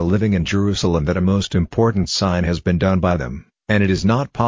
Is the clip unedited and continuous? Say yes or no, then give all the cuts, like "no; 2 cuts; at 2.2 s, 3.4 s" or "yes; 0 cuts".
yes; 0 cuts